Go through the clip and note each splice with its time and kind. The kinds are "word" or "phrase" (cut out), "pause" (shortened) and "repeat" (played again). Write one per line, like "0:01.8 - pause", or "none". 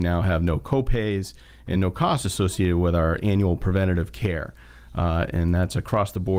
none